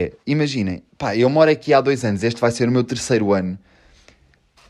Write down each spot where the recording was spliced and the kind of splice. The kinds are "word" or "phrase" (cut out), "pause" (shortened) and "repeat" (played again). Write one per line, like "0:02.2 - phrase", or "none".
none